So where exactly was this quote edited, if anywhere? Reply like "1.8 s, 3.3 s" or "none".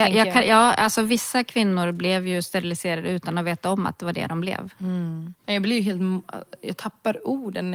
5.4 s